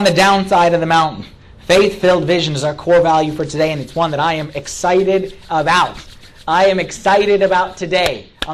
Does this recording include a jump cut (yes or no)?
no